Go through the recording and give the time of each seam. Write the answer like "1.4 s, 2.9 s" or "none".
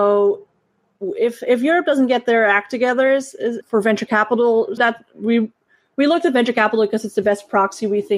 4.8 s